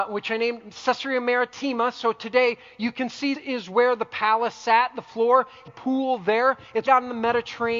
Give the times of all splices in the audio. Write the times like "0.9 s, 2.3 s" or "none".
3.3 s, 5.7 s, 6.9 s

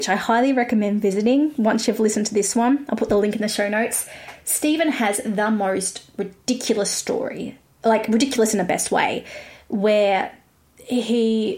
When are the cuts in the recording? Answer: none

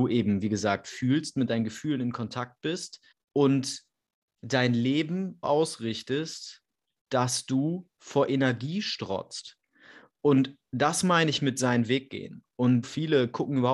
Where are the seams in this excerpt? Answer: 3.1 s, 5.4 s, 7.9 s, 12.8 s

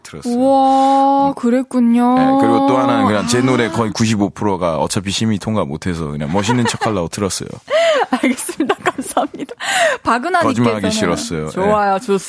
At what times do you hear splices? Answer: none

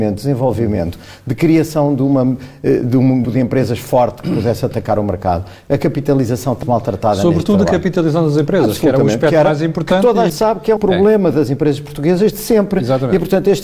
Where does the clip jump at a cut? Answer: 3.2 s, 6.6 s, 10.3 s, 10.8 s

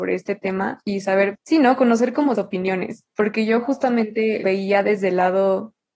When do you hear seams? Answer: 1.3 s, 2.3 s, 4.4 s

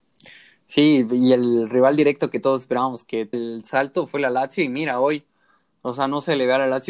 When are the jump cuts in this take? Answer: 3.3 s

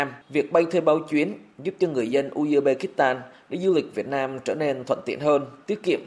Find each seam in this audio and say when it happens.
none

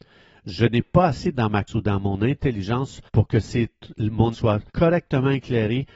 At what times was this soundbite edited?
1.4 s, 1.7 s, 3.1 s, 4.3 s, 4.7 s

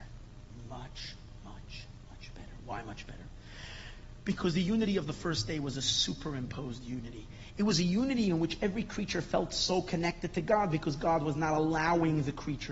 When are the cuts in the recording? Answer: none

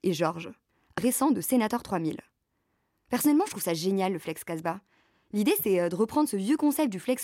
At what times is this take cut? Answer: 1.0 s

